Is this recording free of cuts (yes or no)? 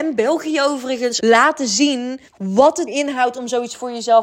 no